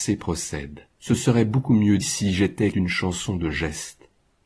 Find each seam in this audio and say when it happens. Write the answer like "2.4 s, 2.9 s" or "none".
0.9 s, 2.0 s, 2.7 s